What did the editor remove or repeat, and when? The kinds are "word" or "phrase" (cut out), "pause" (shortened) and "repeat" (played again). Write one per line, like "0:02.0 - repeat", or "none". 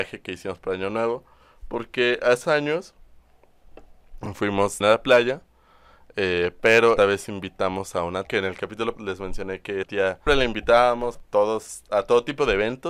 0:02.4 - word
0:04.8 - word
0:07.0 - word
0:08.2 - word
0:09.0 - word
0:09.8 - word
0:10.3 - word
0:11.1 - word